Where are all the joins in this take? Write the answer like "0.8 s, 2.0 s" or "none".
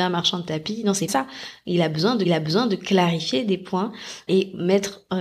1.1 s, 2.2 s, 4.3 s

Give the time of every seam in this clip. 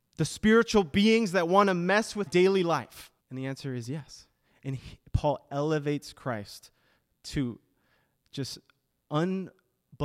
2.3 s, 3.2 s

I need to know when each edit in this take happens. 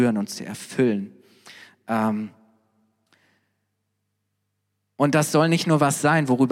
none

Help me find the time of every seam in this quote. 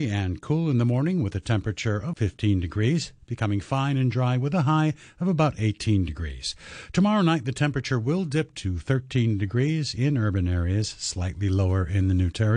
2.1 s

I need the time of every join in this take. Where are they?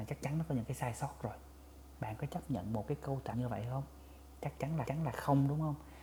3.3 s, 4.9 s

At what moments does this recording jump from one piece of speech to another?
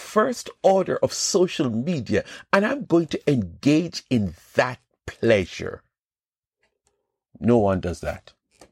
none

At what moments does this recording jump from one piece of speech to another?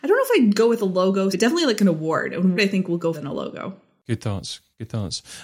1.3 s, 2.6 s, 3.1 s

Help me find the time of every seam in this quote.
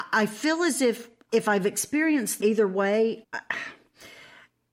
1.3 s, 2.4 s, 3.2 s

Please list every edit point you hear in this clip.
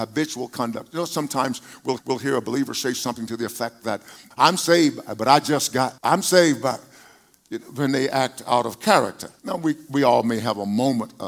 2.0 s, 4.3 s, 6.0 s, 9.4 s

